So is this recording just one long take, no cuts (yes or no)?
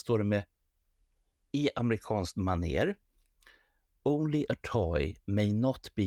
yes